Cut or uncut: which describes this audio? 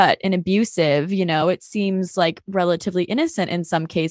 uncut